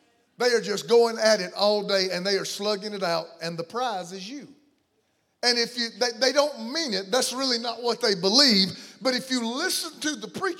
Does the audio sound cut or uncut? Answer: cut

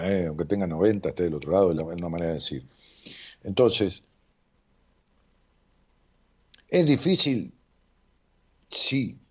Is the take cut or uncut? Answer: uncut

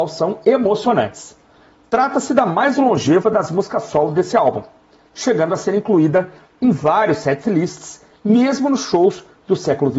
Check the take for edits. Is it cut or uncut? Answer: uncut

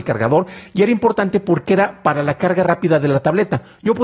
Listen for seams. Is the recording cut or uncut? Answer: uncut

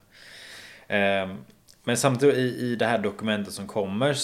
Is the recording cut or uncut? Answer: uncut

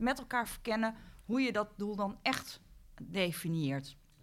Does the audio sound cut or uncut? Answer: uncut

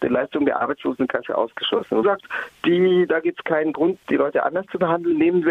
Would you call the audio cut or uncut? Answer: cut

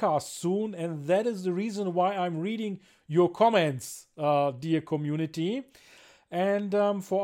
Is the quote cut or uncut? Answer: uncut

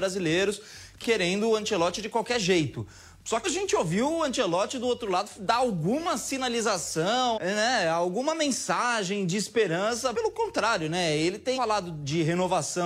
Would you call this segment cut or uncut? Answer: cut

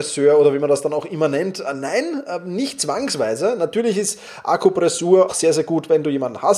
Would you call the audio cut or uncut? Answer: cut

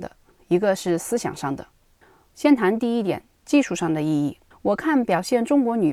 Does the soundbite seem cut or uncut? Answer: cut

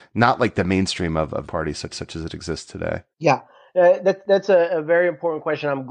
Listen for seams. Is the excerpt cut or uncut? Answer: cut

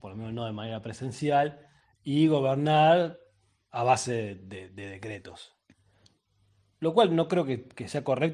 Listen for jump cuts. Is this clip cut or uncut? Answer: uncut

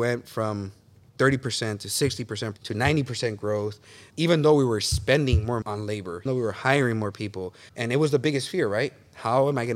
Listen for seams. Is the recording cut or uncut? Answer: cut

